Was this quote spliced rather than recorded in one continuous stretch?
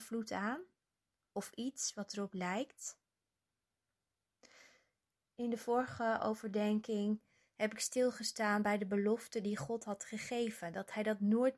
no; 0 cuts

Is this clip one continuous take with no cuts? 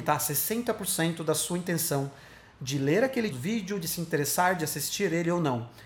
no; 1 cut; at 3.3 s

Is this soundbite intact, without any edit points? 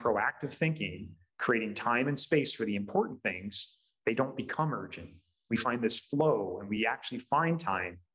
yes; 0 cuts

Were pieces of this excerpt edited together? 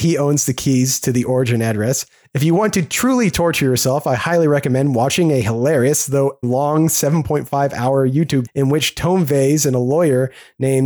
yes; 2 cuts; at 6.4 s, 8.5 s

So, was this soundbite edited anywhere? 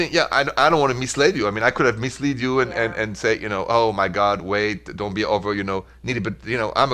no; 0 cuts

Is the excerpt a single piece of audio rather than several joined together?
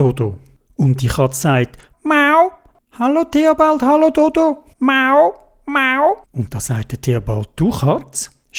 no; 3 cuts; at 1.9 s, 4.7 s, 6.2 s

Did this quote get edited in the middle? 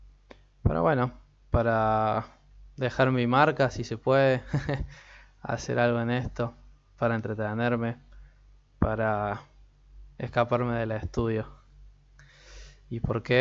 no; 0 cuts

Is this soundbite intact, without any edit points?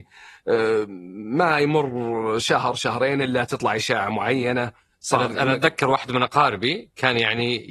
yes; 0 cuts

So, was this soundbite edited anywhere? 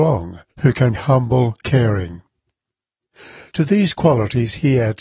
yes; 2 cuts; at 0.9 s, 1.6 s

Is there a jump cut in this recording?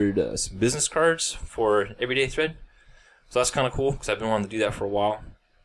no; 0 cuts

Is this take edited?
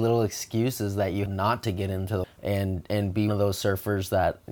yes; 3 cuts; at 1.3 s, 2.2 s, 3.3 s

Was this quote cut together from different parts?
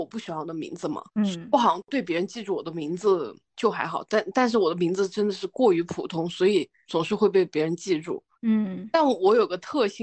yes; 1 cut; at 1.1 s

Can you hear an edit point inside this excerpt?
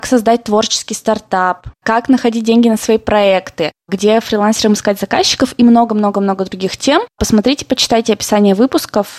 no; 0 cuts

